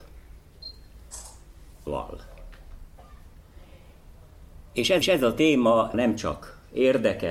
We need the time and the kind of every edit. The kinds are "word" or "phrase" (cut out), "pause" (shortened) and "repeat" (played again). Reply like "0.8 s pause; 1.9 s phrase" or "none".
1.9 s word; 5.0 s repeat; 5.9 s phrase